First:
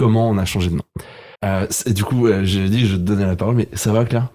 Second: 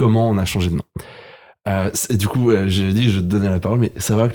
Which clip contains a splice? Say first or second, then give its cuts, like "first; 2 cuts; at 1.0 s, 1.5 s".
first; 1 cut; at 1.3 s